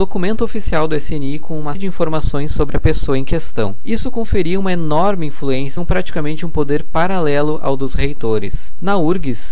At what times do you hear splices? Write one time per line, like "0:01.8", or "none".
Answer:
0:01.7
0:05.8